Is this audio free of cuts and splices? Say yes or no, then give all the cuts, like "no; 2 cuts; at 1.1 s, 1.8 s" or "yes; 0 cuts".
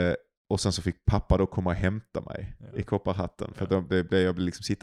yes; 0 cuts